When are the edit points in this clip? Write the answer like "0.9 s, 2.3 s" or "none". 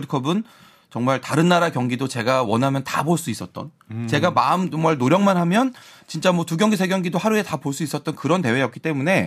3.8 s